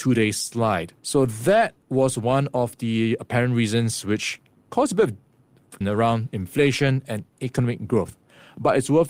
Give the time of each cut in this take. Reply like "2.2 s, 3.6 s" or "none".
1.0 s, 1.8 s, 5.8 s

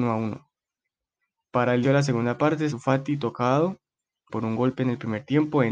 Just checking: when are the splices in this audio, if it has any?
1.8 s, 2.7 s, 4.3 s

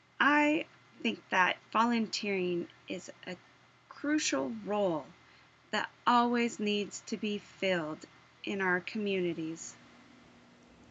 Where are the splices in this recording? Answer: none

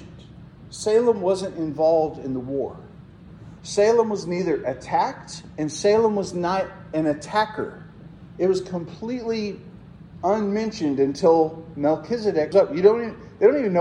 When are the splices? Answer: 3.6 s, 12.5 s

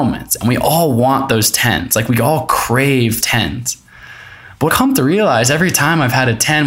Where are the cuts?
3.2 s, 4.7 s

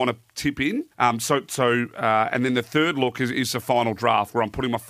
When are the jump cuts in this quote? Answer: 0.9 s

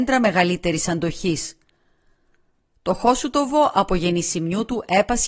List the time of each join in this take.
none

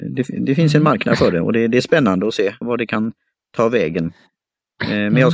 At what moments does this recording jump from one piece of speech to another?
2.6 s

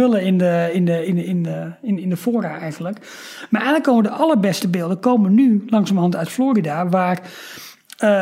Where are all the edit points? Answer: none

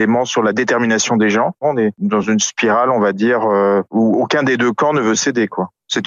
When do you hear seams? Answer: none

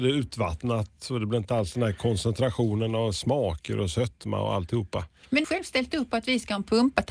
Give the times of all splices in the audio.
5.4 s

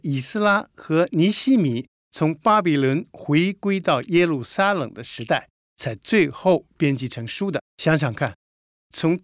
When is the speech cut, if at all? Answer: 7.7 s

